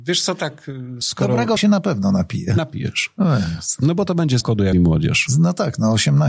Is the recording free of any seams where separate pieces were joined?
no; 4 cuts; at 1.0 s, 1.6 s, 4.4 s, 4.7 s

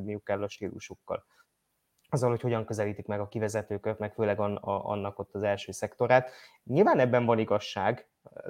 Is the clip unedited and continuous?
yes; 0 cuts

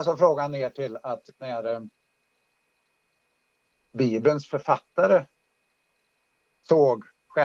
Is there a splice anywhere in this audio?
no; 0 cuts

